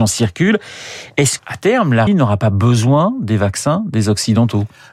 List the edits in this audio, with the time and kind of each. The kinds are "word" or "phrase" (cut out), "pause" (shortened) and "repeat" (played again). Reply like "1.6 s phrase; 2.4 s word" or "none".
1.4 s word; 2.1 s word